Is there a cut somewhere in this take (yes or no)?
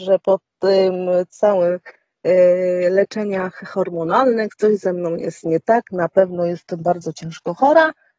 no